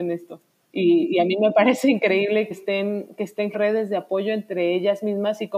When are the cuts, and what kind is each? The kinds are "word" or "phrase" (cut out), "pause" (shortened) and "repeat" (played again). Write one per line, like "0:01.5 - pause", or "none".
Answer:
0:02.5 - word
0:03.5 - word